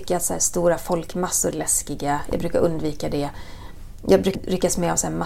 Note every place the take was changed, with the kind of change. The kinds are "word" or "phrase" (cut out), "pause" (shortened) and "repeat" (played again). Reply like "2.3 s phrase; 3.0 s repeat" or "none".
1.5 s phrase; 4.3 s word